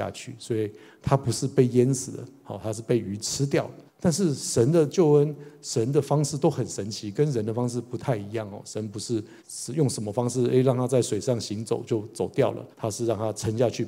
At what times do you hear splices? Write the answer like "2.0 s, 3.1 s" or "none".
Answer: 3.9 s, 9.4 s, 12.7 s